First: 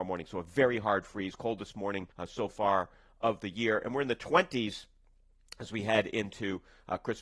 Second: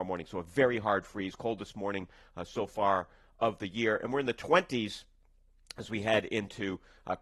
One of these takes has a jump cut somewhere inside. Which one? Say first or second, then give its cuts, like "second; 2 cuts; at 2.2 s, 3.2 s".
first; 1 cut; at 2.1 s